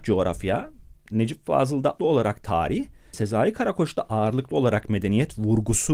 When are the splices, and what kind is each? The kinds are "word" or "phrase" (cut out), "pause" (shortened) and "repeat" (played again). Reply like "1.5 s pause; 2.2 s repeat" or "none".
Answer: 2.0 s word; 3.1 s word